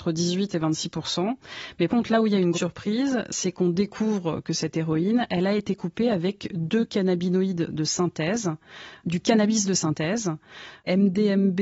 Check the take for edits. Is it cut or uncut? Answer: cut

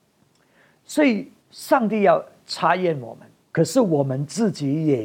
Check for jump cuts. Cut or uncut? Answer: cut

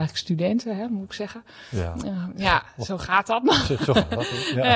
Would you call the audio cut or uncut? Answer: uncut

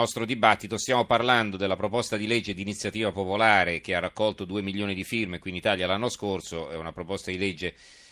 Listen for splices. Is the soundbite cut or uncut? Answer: uncut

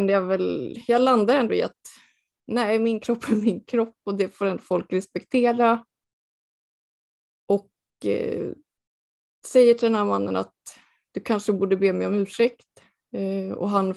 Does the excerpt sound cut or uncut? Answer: uncut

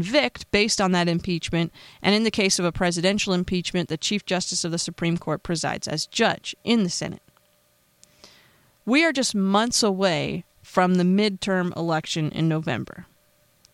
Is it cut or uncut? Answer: uncut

